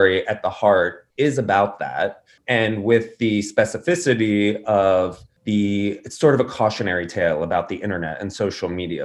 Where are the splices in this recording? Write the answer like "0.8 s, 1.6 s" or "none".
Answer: 1.1 s